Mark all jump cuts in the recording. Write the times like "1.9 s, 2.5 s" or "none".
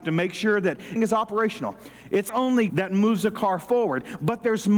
1.0 s, 2.3 s, 2.7 s